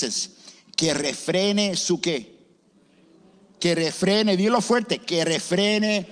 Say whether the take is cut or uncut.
uncut